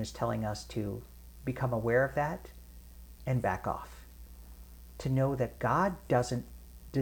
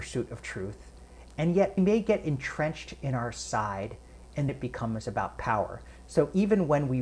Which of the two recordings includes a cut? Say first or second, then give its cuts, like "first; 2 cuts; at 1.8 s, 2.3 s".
second; 2 cuts; at 1.8 s, 4.5 s